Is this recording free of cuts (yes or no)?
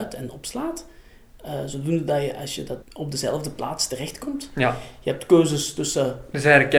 no